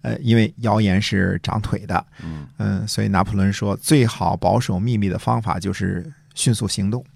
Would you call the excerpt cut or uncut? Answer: uncut